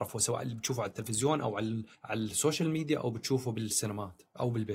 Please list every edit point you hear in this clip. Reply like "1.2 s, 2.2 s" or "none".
1.9 s